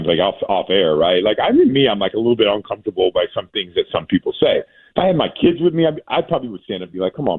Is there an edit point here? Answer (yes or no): no